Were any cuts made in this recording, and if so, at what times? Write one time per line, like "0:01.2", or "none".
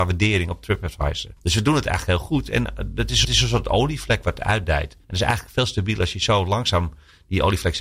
0:01.4
0:03.2
0:05.0